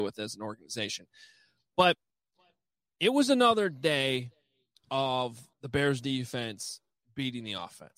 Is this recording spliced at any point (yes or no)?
yes